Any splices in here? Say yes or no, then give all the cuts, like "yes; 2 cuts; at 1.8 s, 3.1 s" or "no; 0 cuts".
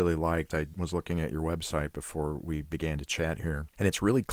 no; 0 cuts